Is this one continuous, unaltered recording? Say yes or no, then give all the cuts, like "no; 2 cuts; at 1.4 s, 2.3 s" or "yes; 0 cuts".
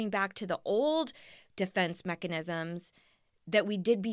yes; 0 cuts